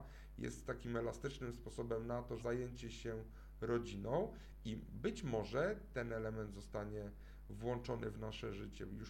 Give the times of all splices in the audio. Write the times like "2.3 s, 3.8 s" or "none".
2.4 s